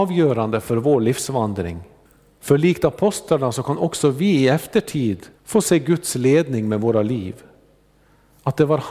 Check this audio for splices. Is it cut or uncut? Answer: cut